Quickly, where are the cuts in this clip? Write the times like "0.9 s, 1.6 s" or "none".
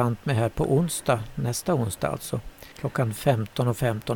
2.7 s